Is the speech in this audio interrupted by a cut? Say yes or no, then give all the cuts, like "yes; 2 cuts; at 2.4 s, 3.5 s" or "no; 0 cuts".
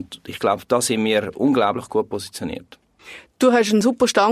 no; 0 cuts